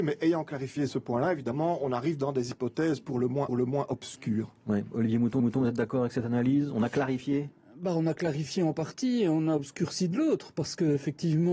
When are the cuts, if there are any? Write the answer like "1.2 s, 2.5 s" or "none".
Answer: 3.5 s, 5.4 s